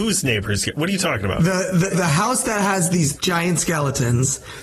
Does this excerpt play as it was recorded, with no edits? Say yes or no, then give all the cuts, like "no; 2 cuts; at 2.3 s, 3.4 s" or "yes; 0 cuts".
no; 2 cuts; at 1.9 s, 3.1 s